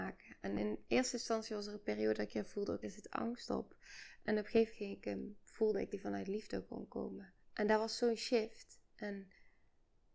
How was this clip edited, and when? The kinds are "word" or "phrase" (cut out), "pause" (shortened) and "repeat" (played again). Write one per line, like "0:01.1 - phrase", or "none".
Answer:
0:02.3 - word
0:02.8 - word
0:04.7 - word
0:05.9 - word
0:07.4 - pause